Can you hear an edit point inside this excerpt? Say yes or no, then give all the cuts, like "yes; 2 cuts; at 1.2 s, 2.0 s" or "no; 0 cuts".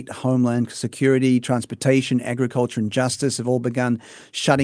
no; 0 cuts